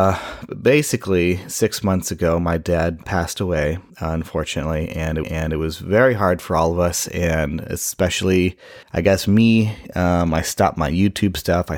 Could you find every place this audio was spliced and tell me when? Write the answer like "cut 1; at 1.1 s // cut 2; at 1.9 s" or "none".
cut 1; at 3.0 s // cut 2; at 3.9 s // cut 3; at 5.2 s // cut 4; at 8.8 s